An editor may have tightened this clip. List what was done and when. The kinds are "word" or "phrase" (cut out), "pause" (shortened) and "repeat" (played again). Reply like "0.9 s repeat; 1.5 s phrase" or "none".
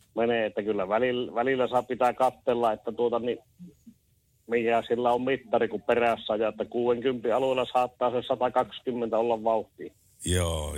none